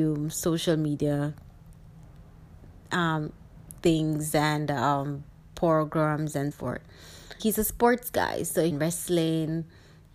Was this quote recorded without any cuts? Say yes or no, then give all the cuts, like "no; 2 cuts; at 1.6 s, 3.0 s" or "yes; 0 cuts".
no; 4 cuts; at 3.8 s, 6.5 s, 7.4 s, 8.7 s